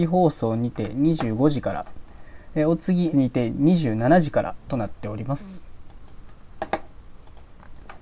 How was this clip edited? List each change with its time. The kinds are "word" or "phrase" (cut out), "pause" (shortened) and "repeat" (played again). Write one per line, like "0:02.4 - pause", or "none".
0:03.1 - word